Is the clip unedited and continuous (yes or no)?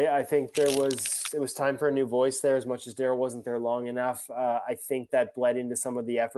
no